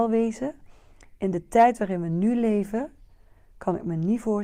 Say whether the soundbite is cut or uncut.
uncut